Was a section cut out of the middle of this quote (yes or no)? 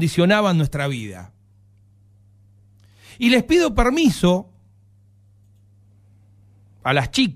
no